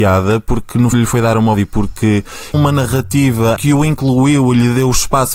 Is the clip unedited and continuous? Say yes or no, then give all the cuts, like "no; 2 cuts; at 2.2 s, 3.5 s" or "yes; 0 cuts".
no; 4 cuts; at 0.9 s, 1.5 s, 2.5 s, 3.6 s